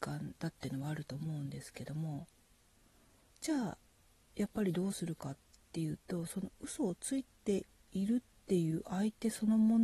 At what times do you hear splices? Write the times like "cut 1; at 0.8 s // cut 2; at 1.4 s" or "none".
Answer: none